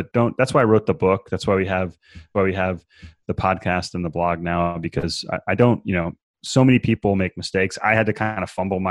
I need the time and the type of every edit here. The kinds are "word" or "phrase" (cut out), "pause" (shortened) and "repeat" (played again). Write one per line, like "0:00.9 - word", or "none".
0:02.3 - repeat